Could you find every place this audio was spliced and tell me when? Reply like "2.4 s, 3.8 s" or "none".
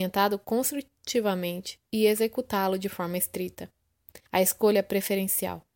4.3 s